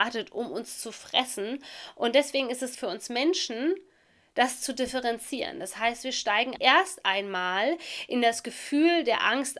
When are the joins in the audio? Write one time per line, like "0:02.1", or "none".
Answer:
0:02.7
0:06.6